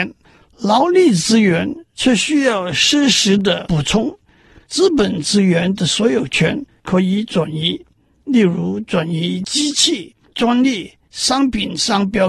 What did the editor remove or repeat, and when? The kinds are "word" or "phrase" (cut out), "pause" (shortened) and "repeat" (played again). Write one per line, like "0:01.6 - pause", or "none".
none

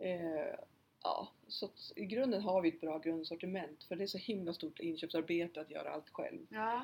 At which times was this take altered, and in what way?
none

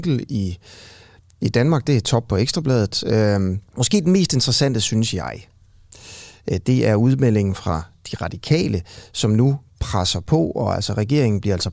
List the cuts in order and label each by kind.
0:03.7 - pause

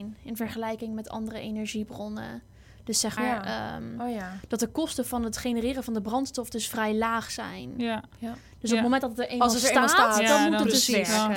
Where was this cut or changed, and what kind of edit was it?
0:03.2 - word

